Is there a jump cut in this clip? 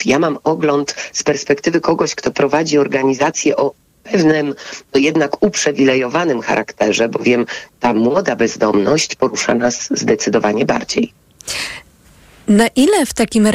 no; 0 cuts

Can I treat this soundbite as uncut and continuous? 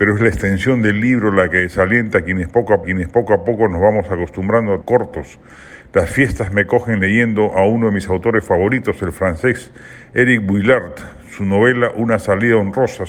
no; 2 cuts; at 2.8 s, 4.8 s

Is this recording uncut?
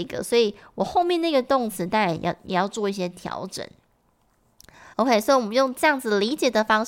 no; 1 cut; at 4.9 s

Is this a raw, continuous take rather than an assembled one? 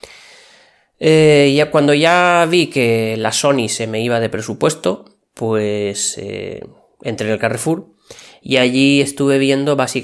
yes; 0 cuts

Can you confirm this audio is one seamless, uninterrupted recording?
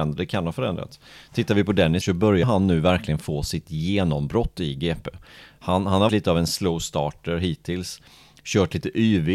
no; 3 cuts; at 2.0 s, 2.4 s, 6.1 s

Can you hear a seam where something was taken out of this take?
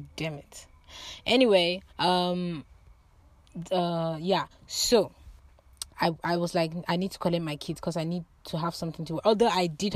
yes; 2 cuts; at 1.9 s, 5.9 s

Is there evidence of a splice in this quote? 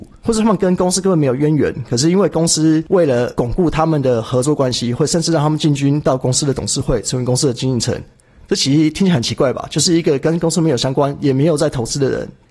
no; 0 cuts

